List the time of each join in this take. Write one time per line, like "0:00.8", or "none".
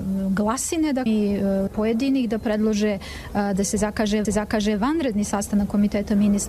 0:01.1
0:01.7
0:04.2